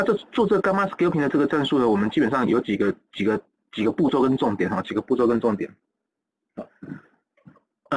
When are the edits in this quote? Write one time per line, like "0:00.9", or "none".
none